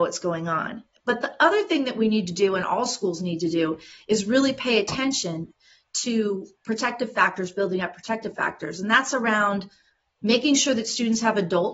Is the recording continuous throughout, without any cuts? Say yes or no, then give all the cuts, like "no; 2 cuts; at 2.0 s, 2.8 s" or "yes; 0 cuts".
yes; 0 cuts